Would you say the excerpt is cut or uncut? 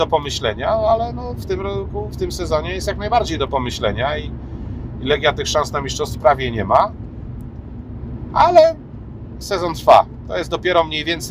cut